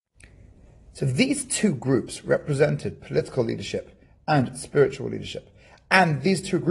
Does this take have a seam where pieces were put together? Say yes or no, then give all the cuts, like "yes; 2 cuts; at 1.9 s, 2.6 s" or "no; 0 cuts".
no; 0 cuts